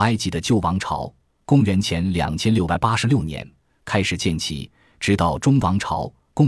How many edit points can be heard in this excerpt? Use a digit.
0